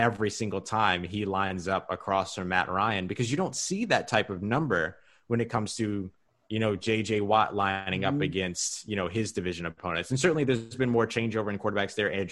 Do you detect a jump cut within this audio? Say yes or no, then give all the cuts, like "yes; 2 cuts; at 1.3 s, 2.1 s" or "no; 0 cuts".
no; 0 cuts